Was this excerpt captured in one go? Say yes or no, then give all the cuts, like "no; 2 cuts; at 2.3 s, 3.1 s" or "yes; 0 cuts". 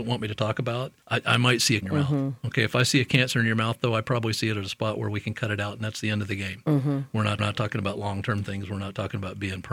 no; 3 cuts; at 1.0 s, 1.8 s, 7.4 s